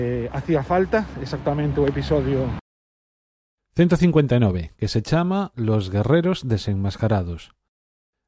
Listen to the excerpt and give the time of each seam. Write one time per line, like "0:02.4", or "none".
none

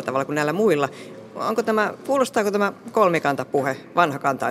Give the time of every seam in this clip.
none

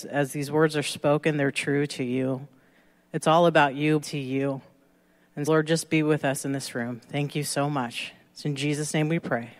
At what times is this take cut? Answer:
0:04.0
0:05.5

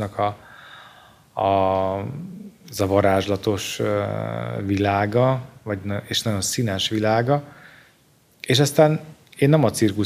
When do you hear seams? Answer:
none

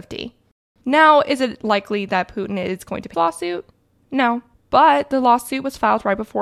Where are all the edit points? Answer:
0:03.1

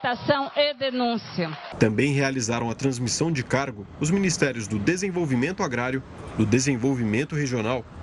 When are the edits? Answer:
none

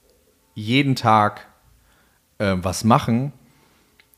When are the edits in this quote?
none

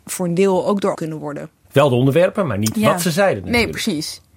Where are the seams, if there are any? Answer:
0:00.9

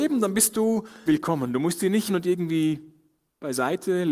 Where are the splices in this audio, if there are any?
0:01.1
0:02.1

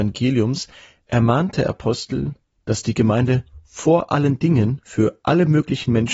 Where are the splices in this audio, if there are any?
none

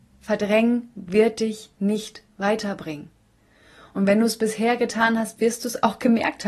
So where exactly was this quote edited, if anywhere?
none

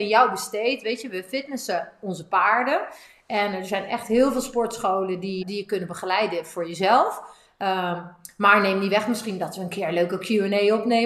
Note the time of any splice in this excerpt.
0:05.4

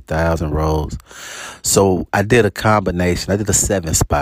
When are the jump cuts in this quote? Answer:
none

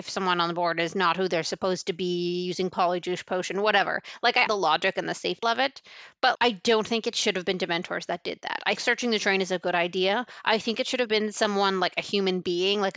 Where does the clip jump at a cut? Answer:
0:04.5
0:05.4
0:06.3
0:08.8

